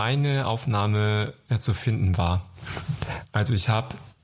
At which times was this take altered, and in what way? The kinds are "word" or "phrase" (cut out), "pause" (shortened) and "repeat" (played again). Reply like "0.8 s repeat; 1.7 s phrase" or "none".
1.5 s word